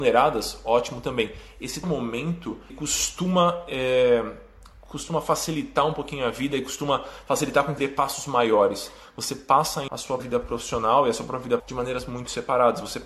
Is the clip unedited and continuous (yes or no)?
no